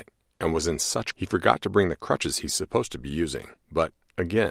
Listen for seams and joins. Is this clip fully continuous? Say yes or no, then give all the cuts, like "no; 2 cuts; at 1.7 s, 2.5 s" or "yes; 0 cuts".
no; 2 cuts; at 1.1 s, 3.6 s